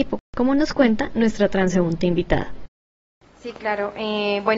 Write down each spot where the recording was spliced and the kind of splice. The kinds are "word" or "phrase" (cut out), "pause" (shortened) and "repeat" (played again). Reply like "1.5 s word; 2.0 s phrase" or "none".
none